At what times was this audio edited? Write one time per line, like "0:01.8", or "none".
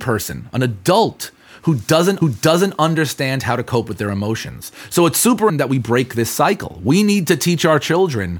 0:02.2
0:05.5